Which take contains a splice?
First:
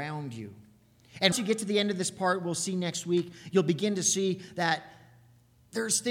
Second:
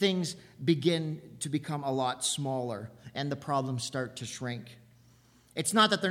first; 1 cut; at 1.3 s

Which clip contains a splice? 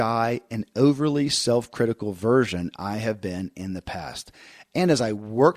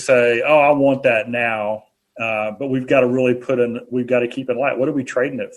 second; 1 cut; at 1.9 s

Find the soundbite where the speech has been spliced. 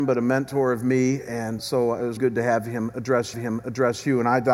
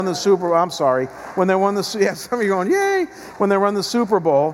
first; 3 cuts; at 1.6 s, 2.2 s, 3.3 s

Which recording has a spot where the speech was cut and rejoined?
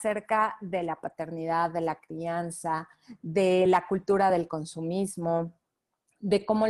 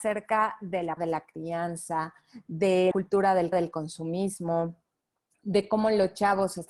second; 3 cuts; at 1.0 s, 2.9 s, 3.5 s

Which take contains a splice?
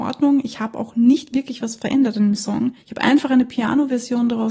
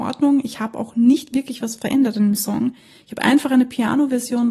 first; 1 cut; at 2.8 s

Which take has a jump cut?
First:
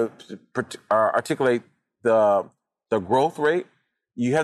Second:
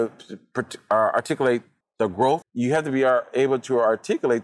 second; 2 cuts; at 1.8 s, 2.4 s

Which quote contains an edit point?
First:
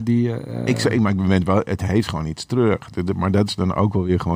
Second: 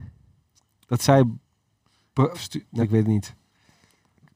second; 2 cuts; at 2.3 s, 2.8 s

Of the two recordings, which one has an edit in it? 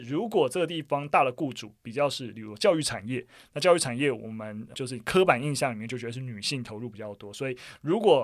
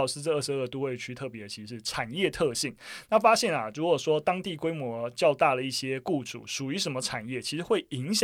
first; 1 cut; at 4.7 s

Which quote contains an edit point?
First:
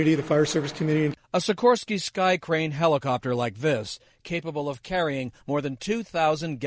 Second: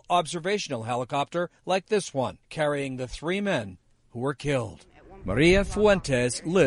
second; 1 cut; at 2.4 s

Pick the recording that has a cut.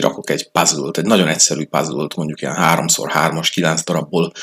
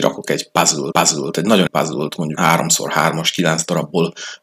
second; 3 cuts; at 0.9 s, 1.7 s, 2.4 s

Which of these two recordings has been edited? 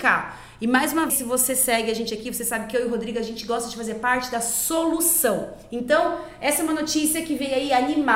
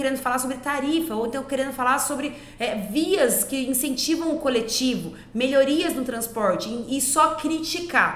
first; 1 cut; at 1.1 s

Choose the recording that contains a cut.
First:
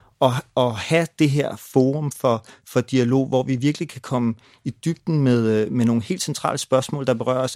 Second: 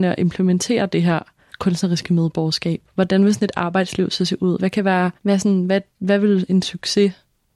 second; 2 cuts; at 1.5 s, 5.2 s

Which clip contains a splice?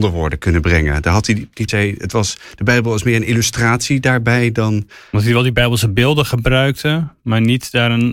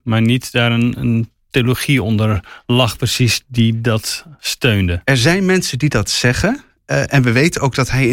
first; 1 cut; at 1.7 s

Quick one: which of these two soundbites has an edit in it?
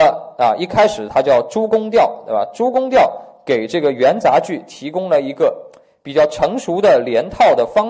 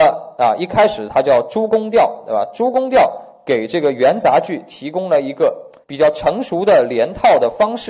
second; 1 cut; at 5.8 s

